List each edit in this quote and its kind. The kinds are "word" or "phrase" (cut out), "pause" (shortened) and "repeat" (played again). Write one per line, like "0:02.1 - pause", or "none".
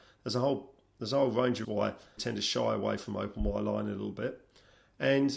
0:01.6 - word
0:02.2 - word